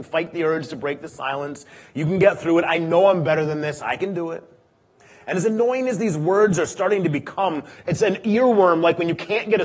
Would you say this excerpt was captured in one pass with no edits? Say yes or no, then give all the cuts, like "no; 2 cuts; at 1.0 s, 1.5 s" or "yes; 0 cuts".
yes; 0 cuts